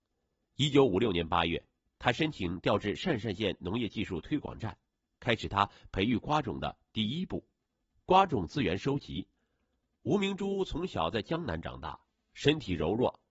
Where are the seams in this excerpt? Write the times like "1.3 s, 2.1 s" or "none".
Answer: none